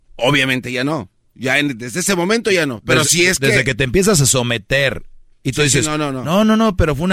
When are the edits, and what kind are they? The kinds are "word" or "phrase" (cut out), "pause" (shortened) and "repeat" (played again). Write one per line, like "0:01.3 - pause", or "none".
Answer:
none